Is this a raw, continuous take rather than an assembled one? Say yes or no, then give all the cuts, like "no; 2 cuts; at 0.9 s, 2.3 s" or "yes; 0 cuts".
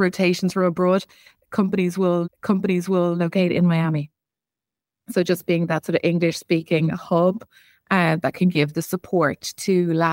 no; 2 cuts; at 2.2 s, 6.4 s